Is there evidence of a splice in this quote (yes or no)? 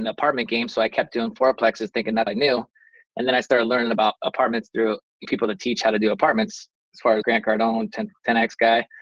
yes